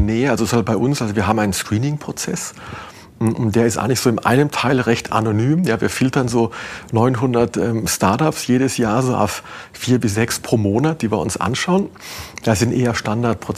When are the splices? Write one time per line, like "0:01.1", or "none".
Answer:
none